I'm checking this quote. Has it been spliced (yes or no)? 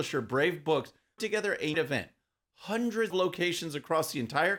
yes